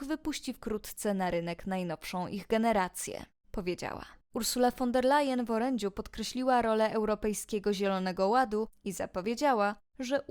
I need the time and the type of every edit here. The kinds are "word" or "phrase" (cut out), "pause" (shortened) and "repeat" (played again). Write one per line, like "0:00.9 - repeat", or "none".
0:04.2 - pause